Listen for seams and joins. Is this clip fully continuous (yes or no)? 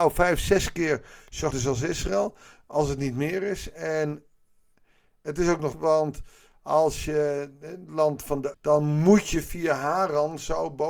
no